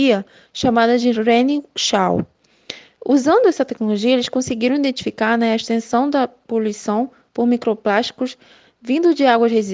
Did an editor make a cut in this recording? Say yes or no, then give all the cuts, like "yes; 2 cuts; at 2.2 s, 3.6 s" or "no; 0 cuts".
no; 0 cuts